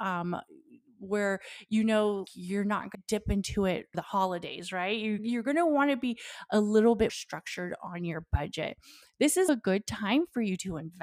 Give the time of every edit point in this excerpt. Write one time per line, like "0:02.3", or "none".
0:02.3
0:02.9
0:03.9
0:05.2
0:07.1
0:09.5